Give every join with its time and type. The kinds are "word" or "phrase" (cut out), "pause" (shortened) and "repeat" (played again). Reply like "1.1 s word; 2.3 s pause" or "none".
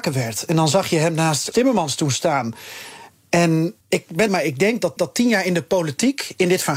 1.5 s word; 3.8 s pause; 4.3 s phrase; 5.0 s repeat